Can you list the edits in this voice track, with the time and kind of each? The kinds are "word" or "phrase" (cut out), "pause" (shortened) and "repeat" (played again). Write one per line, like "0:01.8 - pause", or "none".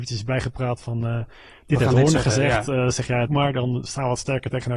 0:03.3 - word